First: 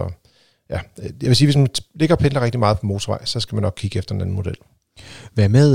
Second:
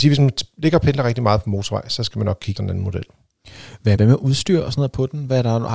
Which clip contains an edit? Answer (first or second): second